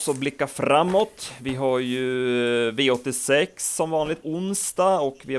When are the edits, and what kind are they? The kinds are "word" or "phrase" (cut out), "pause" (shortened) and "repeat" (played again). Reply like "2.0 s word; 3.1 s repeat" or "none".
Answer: 4.2 s word

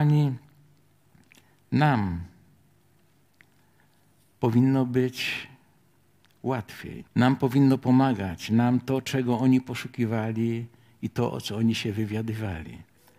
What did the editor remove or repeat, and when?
7.1 s pause

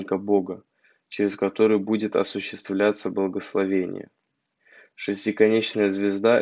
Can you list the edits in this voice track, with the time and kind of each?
none

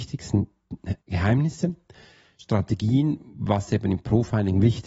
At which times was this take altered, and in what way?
1.0 s pause

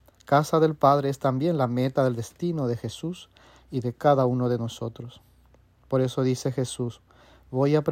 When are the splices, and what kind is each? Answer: none

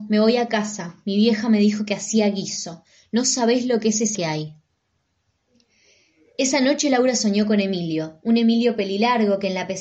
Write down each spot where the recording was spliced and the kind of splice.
4.1 s phrase

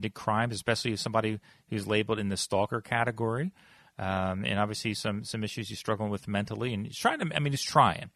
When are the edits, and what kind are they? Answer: none

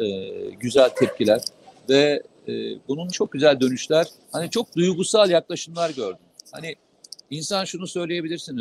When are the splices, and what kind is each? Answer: 1.8 s pause; 3.1 s word; 4.2 s word

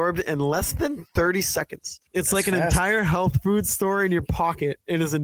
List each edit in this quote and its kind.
2.1 s pause

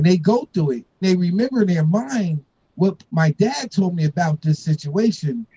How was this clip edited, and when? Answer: 1.0 s word

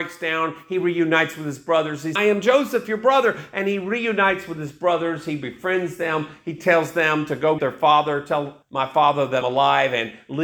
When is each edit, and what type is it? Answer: 2.2 s phrase; 7.6 s word; 8.6 s pause; 9.4 s word

